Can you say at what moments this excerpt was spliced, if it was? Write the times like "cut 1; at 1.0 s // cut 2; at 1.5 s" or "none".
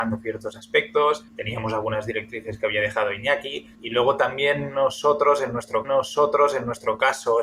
cut 1; at 1.3 s // cut 2; at 3.7 s // cut 3; at 5.8 s